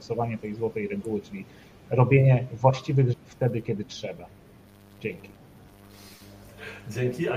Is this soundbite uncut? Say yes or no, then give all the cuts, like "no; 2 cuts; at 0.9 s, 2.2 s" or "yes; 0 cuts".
no; 1 cut; at 3.1 s